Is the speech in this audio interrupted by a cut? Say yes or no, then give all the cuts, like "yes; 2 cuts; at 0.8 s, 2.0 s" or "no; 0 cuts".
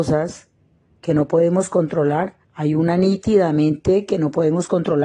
yes; 1 cut; at 2.4 s